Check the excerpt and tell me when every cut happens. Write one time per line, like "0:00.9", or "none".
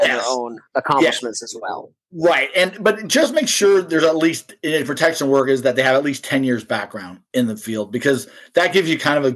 none